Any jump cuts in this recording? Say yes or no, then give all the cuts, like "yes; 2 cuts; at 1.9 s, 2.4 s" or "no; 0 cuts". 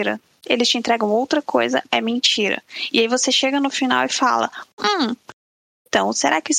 no; 0 cuts